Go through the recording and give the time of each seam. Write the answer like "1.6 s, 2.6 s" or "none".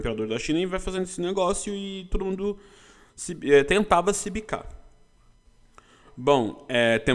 none

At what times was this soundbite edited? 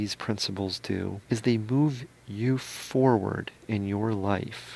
1.2 s

